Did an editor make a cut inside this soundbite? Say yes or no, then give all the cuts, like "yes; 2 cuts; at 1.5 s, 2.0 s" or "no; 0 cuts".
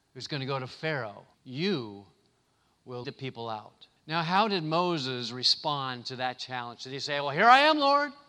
yes; 3 cuts; at 1.3 s, 3.0 s, 4.0 s